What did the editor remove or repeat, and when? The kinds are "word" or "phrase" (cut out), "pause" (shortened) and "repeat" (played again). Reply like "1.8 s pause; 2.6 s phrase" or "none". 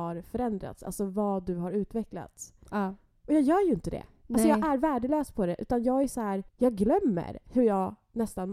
6.5 s pause